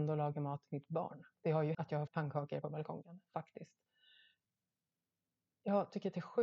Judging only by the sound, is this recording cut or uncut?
cut